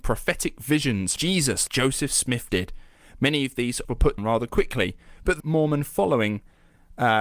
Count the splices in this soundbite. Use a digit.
6